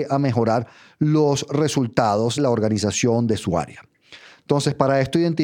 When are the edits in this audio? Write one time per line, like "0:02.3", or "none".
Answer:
0:02.4